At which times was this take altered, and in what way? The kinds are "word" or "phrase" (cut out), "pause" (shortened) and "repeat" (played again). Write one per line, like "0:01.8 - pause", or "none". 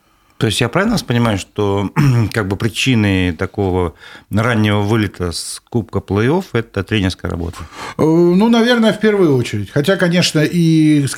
none